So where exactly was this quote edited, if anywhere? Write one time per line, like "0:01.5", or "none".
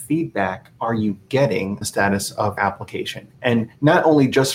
0:01.8
0:02.6